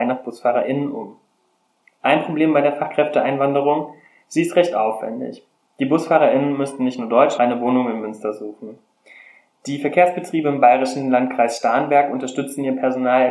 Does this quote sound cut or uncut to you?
cut